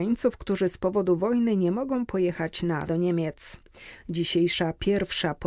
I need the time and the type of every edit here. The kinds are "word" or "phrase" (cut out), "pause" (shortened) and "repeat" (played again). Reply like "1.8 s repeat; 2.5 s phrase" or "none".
2.9 s word